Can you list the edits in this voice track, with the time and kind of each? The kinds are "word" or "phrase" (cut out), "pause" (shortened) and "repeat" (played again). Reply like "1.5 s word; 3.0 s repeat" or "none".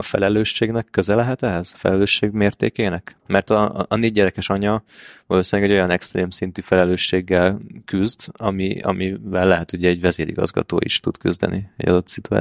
3.2 s pause